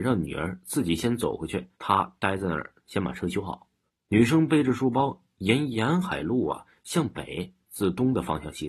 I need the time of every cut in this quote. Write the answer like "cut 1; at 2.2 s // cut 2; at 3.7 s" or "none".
cut 1; at 1.7 s // cut 2; at 3.9 s